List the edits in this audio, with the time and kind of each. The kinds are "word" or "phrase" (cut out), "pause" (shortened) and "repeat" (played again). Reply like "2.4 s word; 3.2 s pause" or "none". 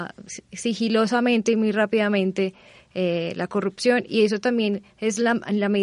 none

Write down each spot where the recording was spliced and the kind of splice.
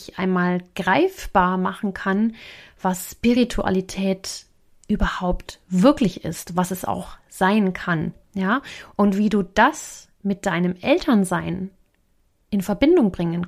none

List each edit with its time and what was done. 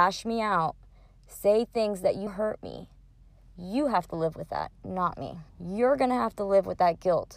2.3 s word; 5.5 s pause

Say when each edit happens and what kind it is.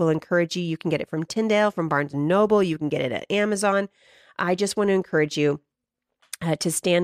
none

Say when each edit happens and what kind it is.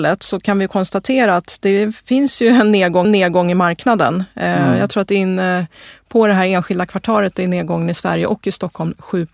3.0 s repeat

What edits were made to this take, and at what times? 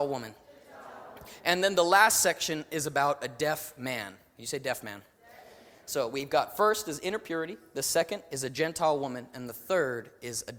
none

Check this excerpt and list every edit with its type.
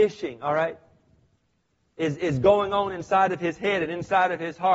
none

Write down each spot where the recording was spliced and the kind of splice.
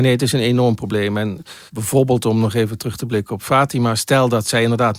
1.7 s pause

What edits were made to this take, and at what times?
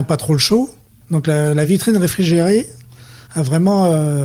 none

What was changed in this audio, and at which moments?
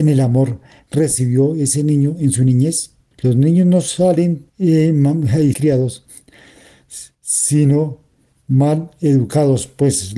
3.1 s pause; 4.5 s pause; 5.5 s phrase

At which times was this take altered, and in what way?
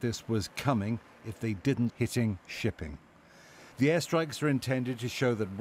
1.9 s word; 3.7 s pause

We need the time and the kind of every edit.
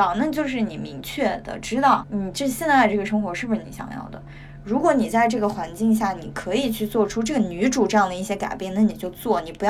2.0 s word

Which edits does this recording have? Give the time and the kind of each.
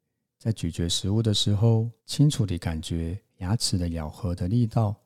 2.0 s pause; 3.3 s pause

